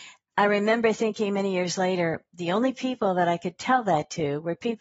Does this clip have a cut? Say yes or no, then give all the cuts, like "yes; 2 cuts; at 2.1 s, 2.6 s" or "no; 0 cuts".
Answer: no; 0 cuts